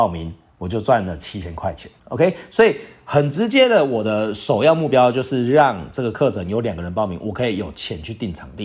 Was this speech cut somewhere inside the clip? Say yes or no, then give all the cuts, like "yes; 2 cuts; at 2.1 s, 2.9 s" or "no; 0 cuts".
yes; 1 cut; at 2.0 s